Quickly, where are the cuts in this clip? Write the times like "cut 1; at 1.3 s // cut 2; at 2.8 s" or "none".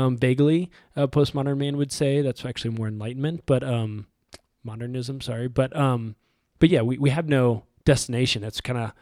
none